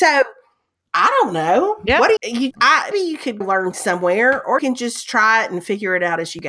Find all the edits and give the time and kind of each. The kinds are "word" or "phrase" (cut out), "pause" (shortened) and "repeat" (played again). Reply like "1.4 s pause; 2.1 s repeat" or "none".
2.2 s word; 2.5 s word; 2.9 s word; 3.4 s word; 3.7 s word; 4.6 s word

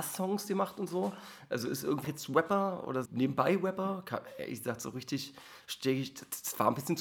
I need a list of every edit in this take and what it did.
2.0 s word; 3.1 s word

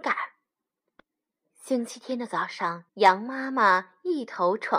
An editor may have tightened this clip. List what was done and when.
2.9 s pause

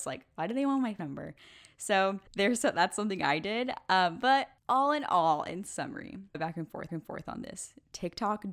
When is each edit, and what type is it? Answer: 1.0 s word; 2.3 s pause; 4.6 s pause; 6.3 s phrase; 6.9 s repeat

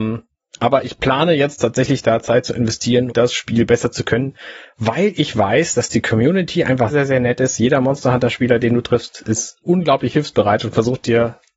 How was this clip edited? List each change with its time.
3.1 s word; 6.9 s word

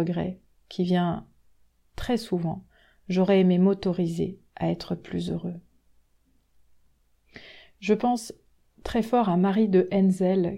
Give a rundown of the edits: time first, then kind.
none

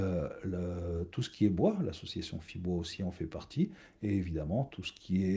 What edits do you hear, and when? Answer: none

